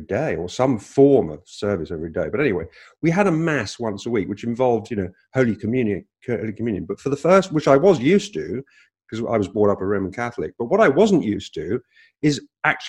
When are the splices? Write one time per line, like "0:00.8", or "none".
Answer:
none